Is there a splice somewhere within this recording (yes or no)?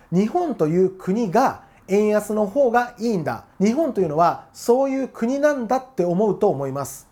yes